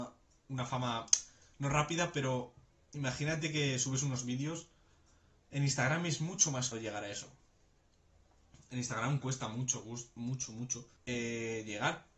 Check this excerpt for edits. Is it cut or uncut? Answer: cut